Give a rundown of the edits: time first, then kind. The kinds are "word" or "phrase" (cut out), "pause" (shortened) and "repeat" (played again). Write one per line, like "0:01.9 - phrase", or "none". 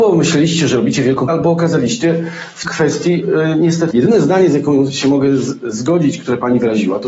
0:01.3 - word
0:02.6 - word
0:03.9 - phrase